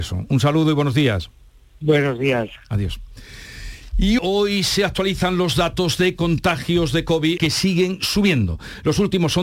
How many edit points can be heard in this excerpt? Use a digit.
2